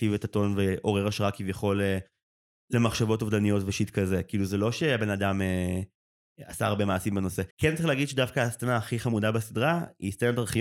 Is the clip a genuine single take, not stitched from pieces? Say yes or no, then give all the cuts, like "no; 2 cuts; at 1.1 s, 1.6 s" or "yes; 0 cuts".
no; 1 cut; at 7.5 s